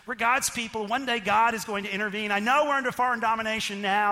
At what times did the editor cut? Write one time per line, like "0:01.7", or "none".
none